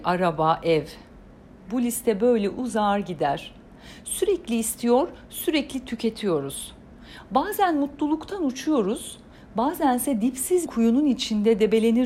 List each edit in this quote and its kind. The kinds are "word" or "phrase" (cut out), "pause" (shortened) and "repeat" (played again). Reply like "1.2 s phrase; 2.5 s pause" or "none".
10.7 s word

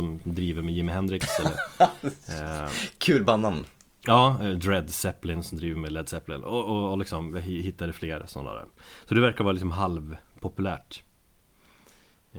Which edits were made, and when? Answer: none

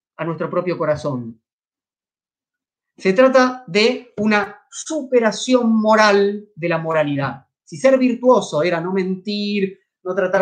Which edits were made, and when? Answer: none

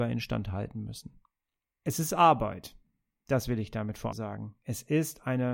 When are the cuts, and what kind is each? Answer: 4.1 s word

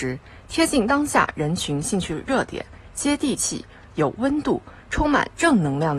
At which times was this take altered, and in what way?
none

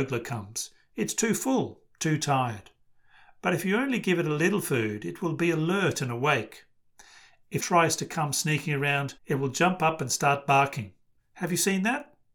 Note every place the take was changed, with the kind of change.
7.6 s word; 9.2 s pause

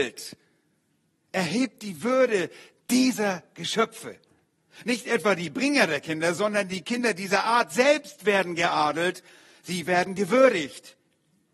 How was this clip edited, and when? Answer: none

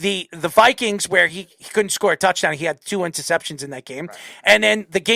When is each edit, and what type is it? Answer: none

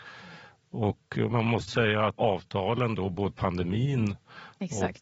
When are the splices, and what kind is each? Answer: 1.7 s word; 2.2 s word; 3.3 s word

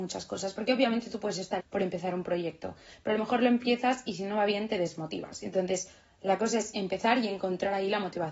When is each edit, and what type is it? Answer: 1.6 s word

